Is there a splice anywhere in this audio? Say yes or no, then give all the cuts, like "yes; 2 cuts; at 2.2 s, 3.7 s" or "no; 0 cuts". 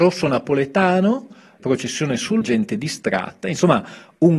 yes; 2 cuts; at 1.6 s, 2.4 s